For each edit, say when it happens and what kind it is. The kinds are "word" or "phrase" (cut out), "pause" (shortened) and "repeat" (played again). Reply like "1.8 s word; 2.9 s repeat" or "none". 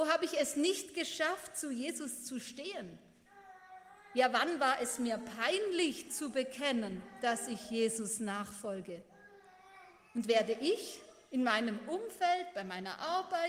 none